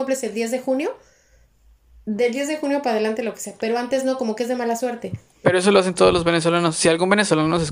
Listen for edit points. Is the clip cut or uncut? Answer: uncut